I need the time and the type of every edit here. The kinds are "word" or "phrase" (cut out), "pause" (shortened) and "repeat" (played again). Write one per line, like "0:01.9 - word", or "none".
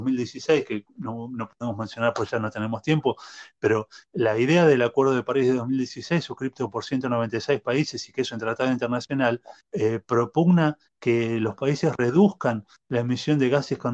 0:09.6 - pause
0:10.9 - pause